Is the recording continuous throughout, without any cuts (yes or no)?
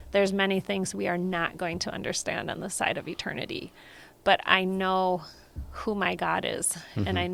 yes